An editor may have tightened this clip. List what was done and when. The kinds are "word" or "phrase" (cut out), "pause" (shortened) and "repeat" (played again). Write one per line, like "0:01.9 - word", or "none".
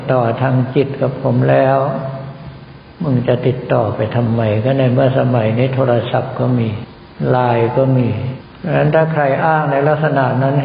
0:08.5 - pause